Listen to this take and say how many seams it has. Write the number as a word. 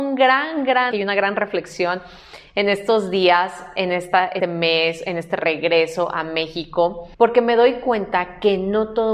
three